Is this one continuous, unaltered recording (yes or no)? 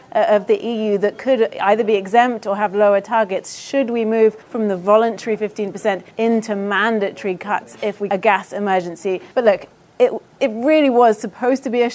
no